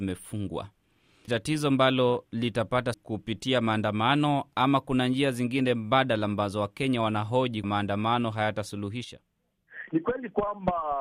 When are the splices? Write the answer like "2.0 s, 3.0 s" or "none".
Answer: 1.3 s, 2.9 s, 7.6 s